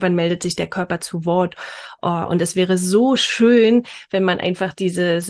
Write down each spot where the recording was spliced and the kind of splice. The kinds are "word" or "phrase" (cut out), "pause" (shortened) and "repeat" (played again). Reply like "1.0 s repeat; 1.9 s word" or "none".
none